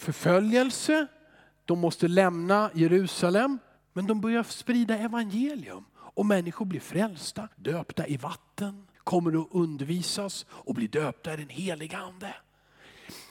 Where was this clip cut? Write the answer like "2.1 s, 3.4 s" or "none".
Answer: 3.8 s, 7.5 s, 8.9 s